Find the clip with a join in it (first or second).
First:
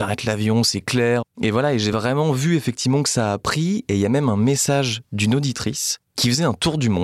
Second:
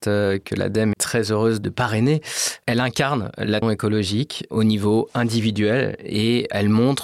second